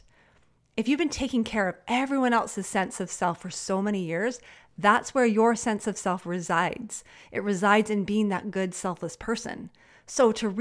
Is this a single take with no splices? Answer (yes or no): yes